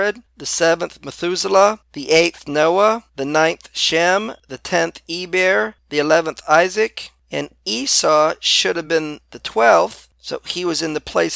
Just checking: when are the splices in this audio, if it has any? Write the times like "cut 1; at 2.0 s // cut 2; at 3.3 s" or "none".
none

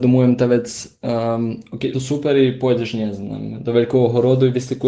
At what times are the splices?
cut 1; at 1.9 s

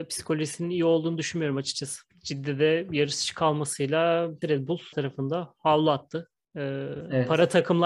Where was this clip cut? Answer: cut 1; at 4.4 s // cut 2; at 4.9 s

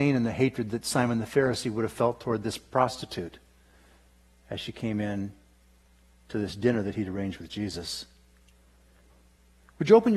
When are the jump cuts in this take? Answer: none

